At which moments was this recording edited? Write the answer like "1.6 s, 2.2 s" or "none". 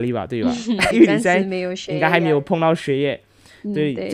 0.9 s